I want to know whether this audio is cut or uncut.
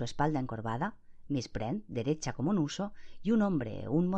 uncut